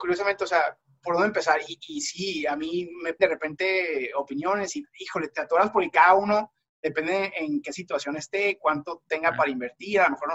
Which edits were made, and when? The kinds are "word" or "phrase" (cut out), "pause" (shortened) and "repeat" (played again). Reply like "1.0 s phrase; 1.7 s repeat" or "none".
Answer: 3.2 s word; 4.8 s word; 5.3 s word